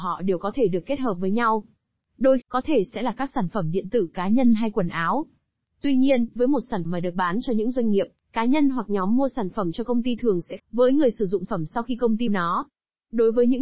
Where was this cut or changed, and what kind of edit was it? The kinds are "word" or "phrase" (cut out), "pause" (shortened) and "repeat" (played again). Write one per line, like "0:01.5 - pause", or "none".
0:02.4 - word
0:06.4 - word
0:06.8 - word
0:10.6 - word
0:11.5 - word
0:12.3 - word